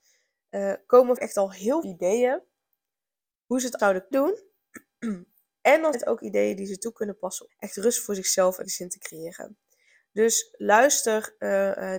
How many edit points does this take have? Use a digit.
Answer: 7